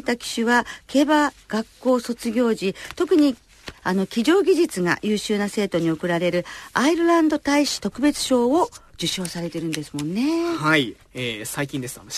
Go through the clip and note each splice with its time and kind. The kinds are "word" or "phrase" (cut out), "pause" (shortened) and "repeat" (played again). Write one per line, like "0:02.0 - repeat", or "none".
0:11.0 - pause